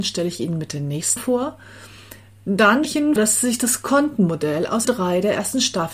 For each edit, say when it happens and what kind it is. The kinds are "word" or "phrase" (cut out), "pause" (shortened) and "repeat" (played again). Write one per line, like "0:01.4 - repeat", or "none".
0:01.2 - word
0:02.8 - word
0:03.2 - word
0:04.8 - word